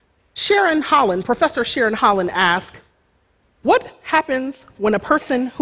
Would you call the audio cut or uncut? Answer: uncut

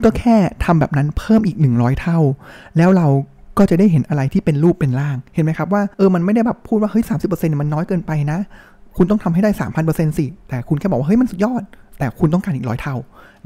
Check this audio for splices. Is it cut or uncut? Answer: cut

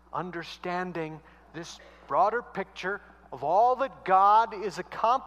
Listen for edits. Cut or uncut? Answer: uncut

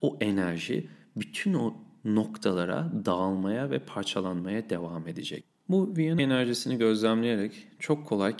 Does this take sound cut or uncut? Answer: cut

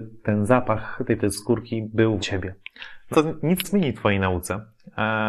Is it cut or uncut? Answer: cut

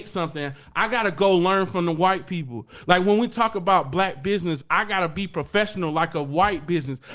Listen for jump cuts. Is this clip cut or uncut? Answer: uncut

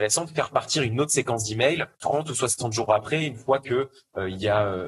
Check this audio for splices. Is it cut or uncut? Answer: cut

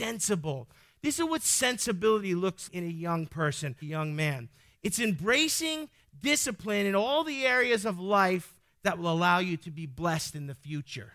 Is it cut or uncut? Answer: cut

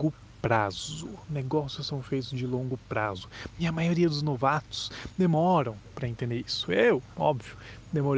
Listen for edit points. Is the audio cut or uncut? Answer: uncut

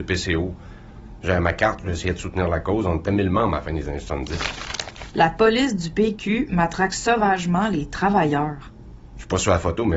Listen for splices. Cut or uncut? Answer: uncut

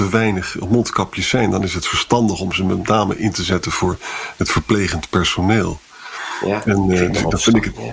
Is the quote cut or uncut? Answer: uncut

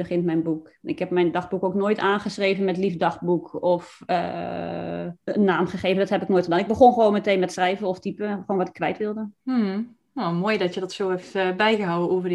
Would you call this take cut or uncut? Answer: cut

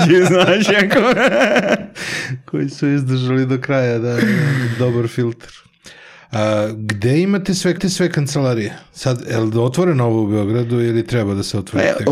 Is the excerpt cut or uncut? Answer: cut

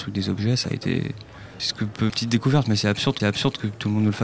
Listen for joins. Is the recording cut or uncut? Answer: cut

